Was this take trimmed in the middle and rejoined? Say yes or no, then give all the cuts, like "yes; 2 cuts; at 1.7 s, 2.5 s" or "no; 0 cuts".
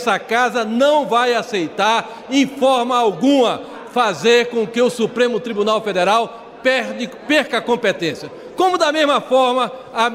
no; 0 cuts